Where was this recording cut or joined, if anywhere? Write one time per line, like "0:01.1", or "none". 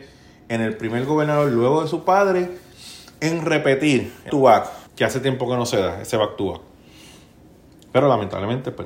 0:04.3
0:04.9